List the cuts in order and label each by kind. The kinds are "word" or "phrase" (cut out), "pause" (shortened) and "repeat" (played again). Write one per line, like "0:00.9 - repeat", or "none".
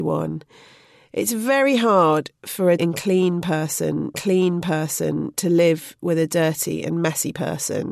0:02.8 - word
0:04.1 - repeat